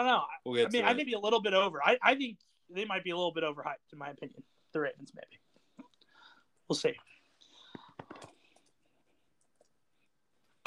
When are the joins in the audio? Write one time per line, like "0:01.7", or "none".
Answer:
0:01.1